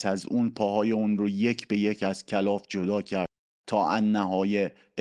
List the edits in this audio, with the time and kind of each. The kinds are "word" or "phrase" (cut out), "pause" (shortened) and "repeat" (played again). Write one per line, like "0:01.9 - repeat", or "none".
none